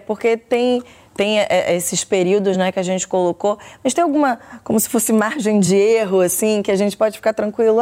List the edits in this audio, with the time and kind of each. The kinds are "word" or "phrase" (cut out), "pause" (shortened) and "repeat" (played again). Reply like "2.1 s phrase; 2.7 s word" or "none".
none